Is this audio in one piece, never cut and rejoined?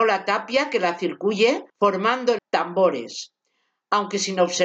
no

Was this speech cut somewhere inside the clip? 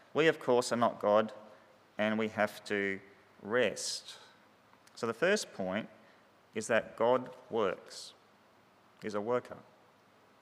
no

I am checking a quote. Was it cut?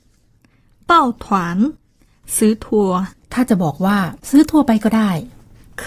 yes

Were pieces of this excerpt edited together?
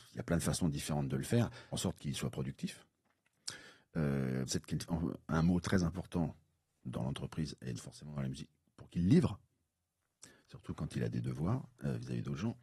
yes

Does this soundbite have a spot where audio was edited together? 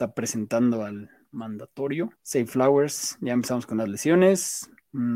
yes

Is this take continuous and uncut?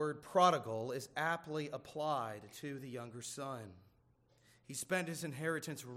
yes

